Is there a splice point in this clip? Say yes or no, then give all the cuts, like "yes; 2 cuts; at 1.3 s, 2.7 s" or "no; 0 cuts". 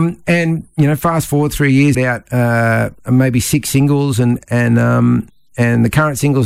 yes; 1 cut; at 1.9 s